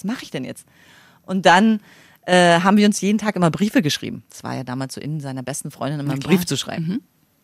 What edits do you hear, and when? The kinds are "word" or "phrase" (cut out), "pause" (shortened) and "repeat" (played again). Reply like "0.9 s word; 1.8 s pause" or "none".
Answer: none